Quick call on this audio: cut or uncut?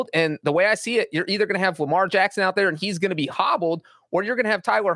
uncut